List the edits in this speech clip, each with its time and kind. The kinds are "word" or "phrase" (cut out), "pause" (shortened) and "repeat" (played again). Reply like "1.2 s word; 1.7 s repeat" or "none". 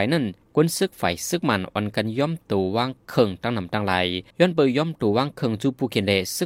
4.3 s pause

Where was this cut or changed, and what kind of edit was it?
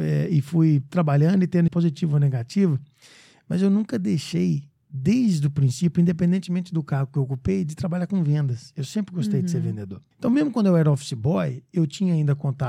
1.7 s word; 4.7 s pause; 10.1 s pause

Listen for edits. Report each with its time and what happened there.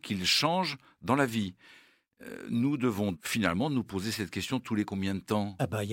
3.1 s word

